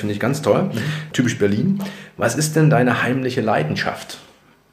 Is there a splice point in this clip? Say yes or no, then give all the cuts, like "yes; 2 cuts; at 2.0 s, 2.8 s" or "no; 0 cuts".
no; 0 cuts